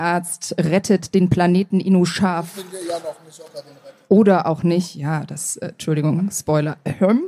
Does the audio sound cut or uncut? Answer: uncut